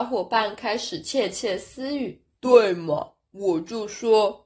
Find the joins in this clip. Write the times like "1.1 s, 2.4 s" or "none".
2.3 s